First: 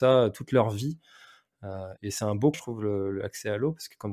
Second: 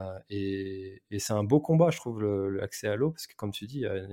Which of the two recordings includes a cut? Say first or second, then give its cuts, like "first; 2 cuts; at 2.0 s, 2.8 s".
first; 2 cuts; at 2.0 s, 2.5 s